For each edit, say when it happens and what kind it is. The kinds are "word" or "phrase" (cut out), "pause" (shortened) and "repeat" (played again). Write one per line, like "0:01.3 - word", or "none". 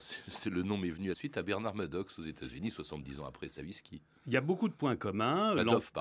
0:01.1 - phrase

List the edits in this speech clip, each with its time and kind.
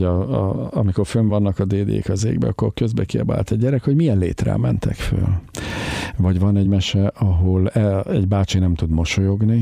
none

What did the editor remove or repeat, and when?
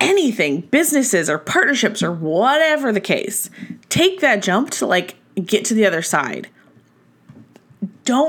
none

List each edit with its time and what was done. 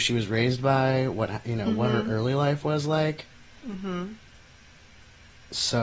none

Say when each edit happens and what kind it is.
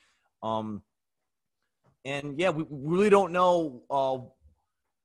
none

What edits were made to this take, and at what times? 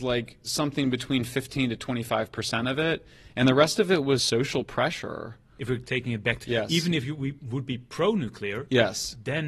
0:04.2 - word
0:06.4 - phrase

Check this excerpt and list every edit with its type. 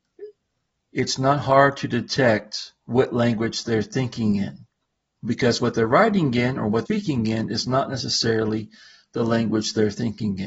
0:06.9 - word

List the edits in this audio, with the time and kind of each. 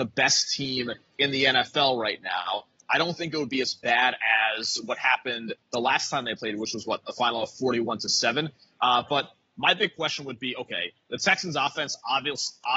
none

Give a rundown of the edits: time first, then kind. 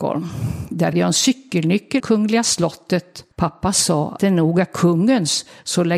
0:00.9 - word
0:02.0 - word
0:03.3 - pause
0:04.2 - word

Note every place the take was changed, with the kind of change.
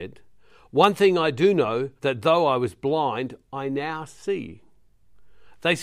0:02.0 - pause

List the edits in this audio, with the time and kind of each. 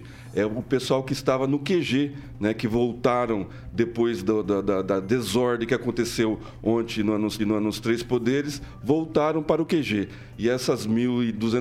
0:07.4 - repeat

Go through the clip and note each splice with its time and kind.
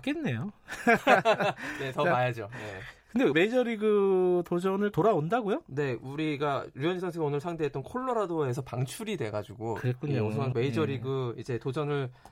0:03.3 - phrase
0:04.9 - word
0:06.7 - word
0:10.5 - word

